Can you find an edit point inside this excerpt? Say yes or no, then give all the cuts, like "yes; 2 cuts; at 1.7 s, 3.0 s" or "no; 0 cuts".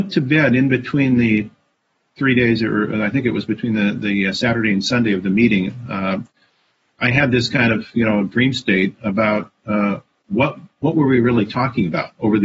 no; 0 cuts